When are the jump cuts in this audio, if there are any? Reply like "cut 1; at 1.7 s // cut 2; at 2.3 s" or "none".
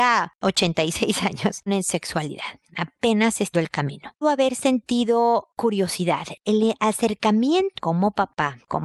cut 1; at 1.7 s // cut 2; at 3.5 s // cut 3; at 4.2 s // cut 4; at 7.8 s